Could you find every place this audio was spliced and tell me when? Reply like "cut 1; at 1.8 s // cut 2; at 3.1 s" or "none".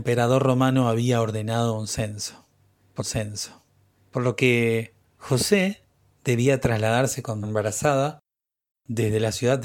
cut 1; at 3.0 s // cut 2; at 7.4 s